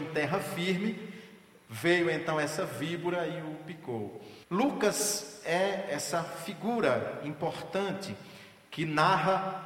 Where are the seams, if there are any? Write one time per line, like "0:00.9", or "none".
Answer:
0:04.4